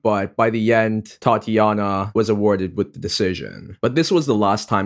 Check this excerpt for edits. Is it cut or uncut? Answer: uncut